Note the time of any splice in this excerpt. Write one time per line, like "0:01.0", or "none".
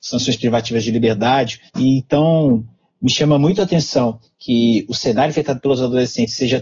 0:01.7